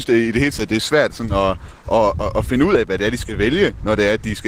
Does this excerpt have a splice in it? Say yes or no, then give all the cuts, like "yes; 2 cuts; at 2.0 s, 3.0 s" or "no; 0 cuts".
no; 0 cuts